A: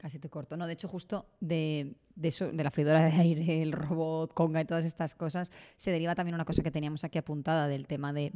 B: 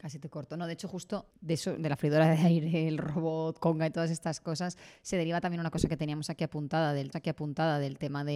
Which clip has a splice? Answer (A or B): B